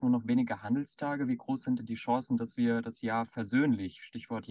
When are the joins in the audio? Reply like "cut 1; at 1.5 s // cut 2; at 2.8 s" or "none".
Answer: none

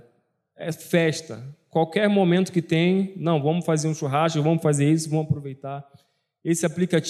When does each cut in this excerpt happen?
none

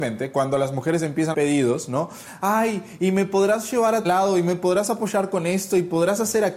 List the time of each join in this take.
cut 1; at 1.3 s // cut 2; at 4.0 s

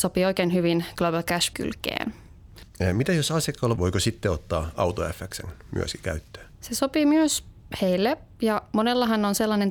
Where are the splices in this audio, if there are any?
cut 1; at 1.5 s // cut 2; at 3.7 s // cut 3; at 6.5 s

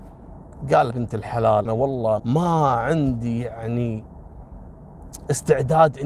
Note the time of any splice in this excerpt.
cut 1; at 0.9 s // cut 2; at 1.7 s // cut 3; at 2.2 s

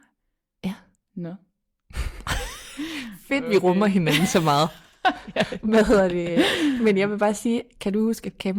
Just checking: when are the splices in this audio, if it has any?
none

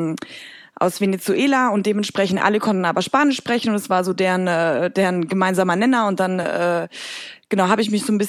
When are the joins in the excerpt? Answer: none

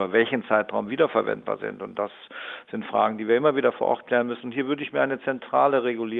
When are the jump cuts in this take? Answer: none

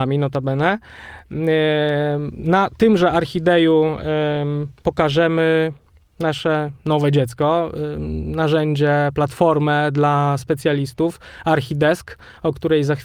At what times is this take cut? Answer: none

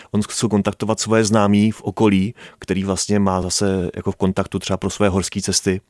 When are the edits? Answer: none

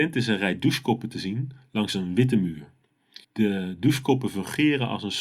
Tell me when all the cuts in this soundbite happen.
cut 1; at 3.2 s

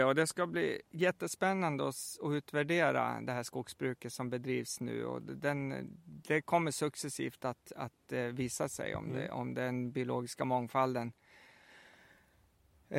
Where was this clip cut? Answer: none

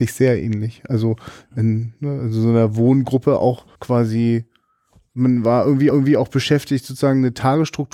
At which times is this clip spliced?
cut 1; at 3.7 s // cut 2; at 5.9 s

